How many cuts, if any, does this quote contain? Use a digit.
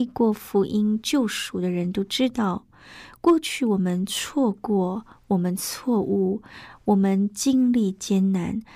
0